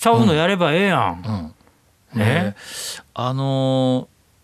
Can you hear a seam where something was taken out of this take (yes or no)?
no